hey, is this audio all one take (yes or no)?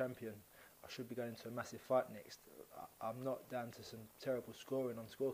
yes